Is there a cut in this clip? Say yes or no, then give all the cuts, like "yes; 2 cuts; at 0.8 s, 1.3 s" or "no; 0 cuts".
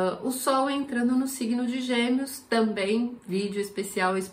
no; 0 cuts